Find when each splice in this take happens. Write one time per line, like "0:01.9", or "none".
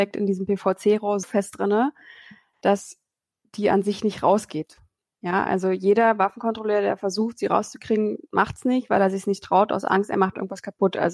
0:01.2

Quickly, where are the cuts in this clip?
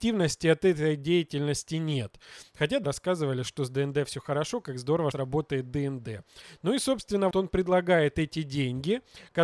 0:02.8
0:05.1
0:07.3

